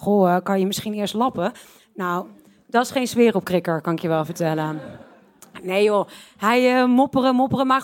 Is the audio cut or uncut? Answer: uncut